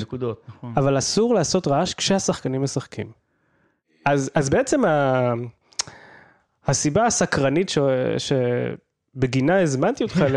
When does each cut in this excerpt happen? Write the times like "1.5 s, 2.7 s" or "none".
none